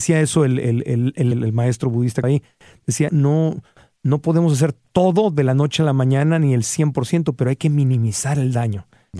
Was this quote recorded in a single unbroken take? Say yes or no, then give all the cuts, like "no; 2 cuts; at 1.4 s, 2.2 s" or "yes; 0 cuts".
no; 4 cuts; at 1.3 s, 2.2 s, 3.1 s, 4.8 s